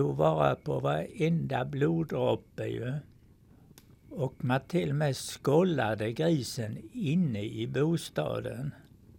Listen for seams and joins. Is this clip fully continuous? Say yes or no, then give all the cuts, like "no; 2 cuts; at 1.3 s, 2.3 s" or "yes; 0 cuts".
yes; 0 cuts